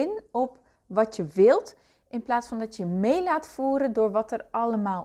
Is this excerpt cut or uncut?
uncut